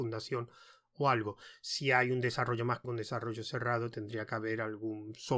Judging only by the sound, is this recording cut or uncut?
cut